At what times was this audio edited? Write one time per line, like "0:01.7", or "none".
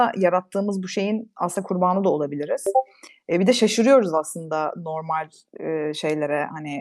none